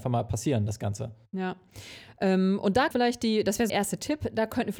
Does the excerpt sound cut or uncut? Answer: cut